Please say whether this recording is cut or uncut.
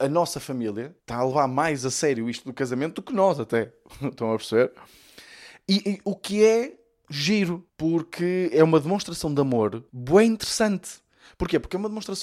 cut